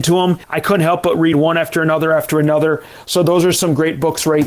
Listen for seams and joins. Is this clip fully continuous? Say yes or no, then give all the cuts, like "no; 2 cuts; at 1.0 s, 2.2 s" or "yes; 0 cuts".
yes; 0 cuts